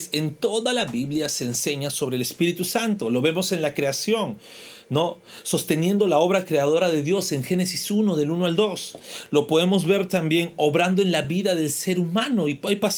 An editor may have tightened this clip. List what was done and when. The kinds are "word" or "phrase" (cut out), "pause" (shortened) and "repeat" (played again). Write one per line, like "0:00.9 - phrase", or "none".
none